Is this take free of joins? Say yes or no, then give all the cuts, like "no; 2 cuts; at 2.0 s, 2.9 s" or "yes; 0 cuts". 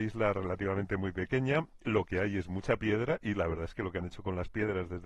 yes; 0 cuts